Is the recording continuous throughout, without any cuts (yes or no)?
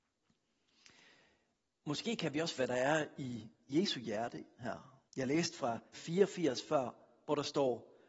no